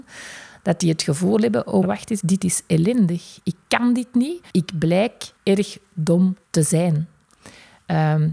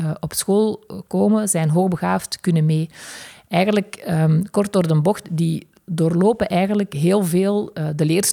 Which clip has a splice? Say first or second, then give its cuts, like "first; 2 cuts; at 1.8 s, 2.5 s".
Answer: first; 5 cuts; at 1.8 s, 2.2 s, 4.5 s, 5.4 s, 6.4 s